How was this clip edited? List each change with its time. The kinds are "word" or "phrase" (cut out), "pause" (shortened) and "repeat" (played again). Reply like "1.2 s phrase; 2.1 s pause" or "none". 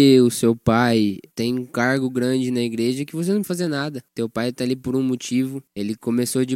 3.4 s word